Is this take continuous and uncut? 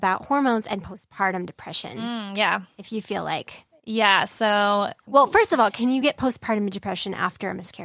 yes; 0 cuts

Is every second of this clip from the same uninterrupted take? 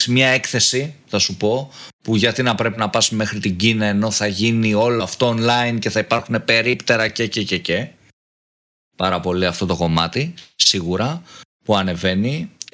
yes; 0 cuts

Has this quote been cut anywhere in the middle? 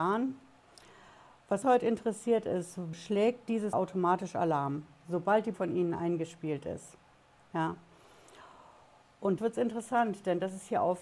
yes; 5 cuts; at 1.6 s, 2.9 s, 3.7 s, 5.5 s, 9.4 s

